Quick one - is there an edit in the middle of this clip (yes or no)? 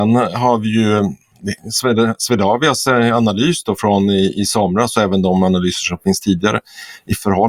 no